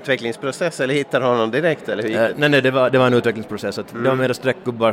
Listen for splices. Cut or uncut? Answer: uncut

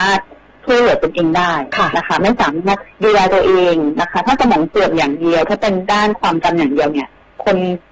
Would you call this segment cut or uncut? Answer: cut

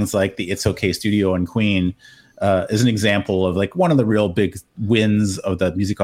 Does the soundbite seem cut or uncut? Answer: uncut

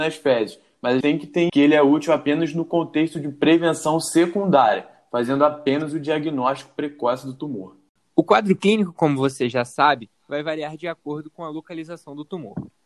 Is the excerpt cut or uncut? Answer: cut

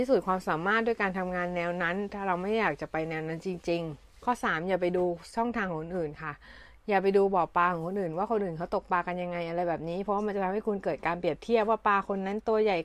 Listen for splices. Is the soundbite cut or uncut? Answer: cut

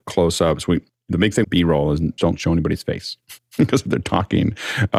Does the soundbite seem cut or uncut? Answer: cut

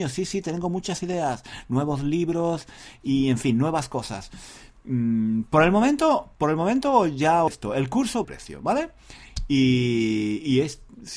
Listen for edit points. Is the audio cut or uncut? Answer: cut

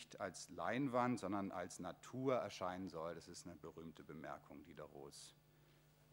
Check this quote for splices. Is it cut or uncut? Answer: uncut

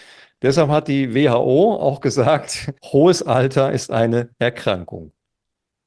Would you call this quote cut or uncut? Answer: cut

